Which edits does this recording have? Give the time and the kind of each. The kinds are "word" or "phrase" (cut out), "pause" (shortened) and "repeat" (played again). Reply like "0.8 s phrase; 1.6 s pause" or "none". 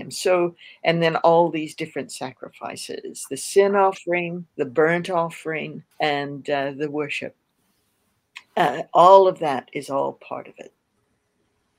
4.5 s pause; 5.9 s pause